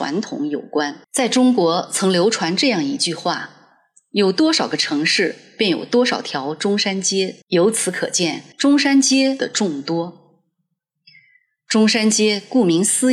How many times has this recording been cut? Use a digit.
3